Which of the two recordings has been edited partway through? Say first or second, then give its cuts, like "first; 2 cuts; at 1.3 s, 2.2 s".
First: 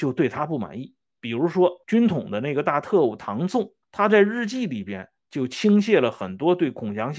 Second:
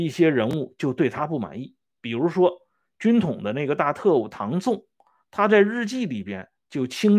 first; 2 cuts; at 1.8 s, 3.8 s